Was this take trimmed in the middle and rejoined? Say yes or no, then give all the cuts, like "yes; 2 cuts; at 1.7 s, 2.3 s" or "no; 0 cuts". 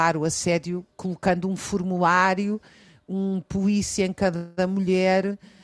no; 0 cuts